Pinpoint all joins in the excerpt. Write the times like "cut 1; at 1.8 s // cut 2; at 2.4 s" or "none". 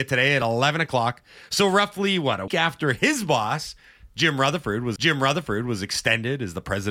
cut 1; at 2.5 s // cut 2; at 5.0 s